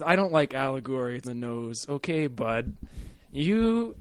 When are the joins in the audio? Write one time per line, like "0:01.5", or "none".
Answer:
0:01.2